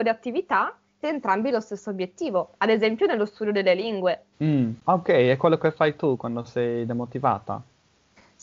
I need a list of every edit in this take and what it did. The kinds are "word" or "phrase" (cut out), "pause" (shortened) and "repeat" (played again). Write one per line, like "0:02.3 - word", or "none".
0:01.0 - word
0:04.3 - pause